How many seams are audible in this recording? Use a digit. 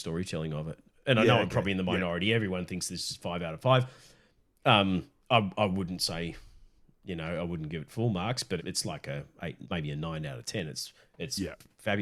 3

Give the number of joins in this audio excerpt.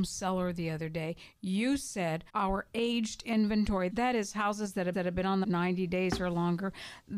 4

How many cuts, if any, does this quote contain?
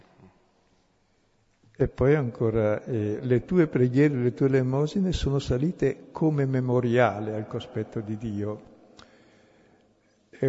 0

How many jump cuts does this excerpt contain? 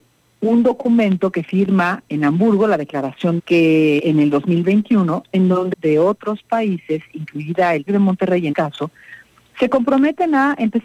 6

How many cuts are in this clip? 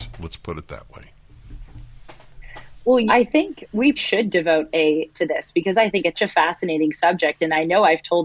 4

